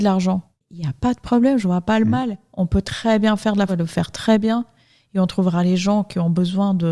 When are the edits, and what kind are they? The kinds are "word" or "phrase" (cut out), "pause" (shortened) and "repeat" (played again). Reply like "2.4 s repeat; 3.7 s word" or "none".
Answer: 3.7 s word

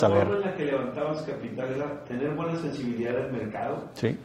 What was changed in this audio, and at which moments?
none

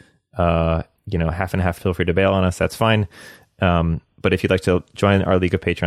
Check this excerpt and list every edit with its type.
1.0 s word; 1.8 s phrase

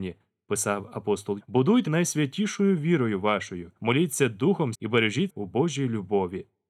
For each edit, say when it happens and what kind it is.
1.4 s word; 1.9 s word; 3.8 s pause; 4.7 s word; 5.3 s word

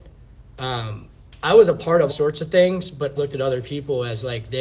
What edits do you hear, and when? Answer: 2.1 s word; 3.2 s word

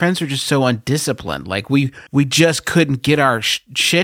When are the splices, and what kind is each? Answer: 2.1 s pause

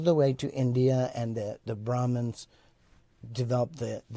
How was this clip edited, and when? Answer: none

